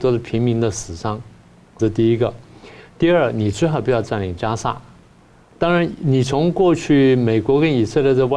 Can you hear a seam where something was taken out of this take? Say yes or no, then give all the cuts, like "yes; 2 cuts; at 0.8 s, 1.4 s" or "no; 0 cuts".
yes; 1 cut; at 1.8 s